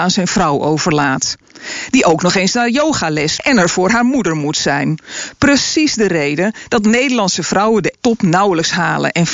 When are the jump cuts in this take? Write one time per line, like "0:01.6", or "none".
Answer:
0:03.4
0:08.0